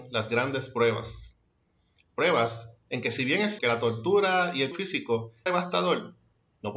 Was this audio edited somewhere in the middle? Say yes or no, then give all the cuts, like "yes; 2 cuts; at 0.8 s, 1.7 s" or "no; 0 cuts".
yes; 3 cuts; at 3.6 s, 4.7 s, 5.5 s